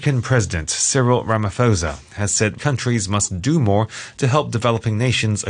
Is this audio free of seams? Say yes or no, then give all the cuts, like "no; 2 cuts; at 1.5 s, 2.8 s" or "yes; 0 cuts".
no; 1 cut; at 2.6 s